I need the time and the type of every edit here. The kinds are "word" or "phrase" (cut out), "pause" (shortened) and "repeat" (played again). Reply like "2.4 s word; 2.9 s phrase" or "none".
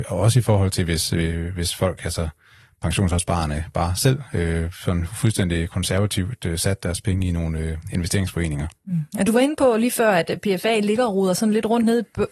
none